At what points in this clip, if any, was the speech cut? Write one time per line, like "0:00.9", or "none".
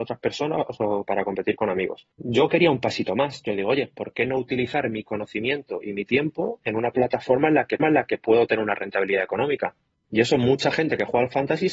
0:02.1
0:07.8